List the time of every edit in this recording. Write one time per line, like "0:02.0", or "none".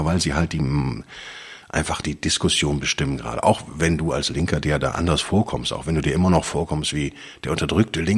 0:02.0